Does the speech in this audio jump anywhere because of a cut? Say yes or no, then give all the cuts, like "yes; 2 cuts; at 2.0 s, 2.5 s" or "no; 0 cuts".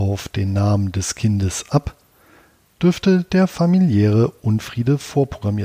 no; 0 cuts